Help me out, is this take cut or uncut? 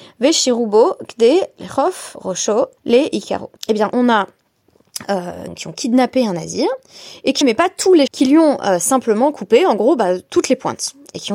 cut